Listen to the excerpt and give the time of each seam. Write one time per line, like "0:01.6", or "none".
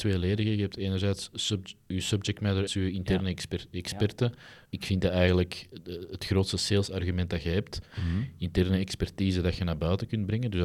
0:02.7
0:04.7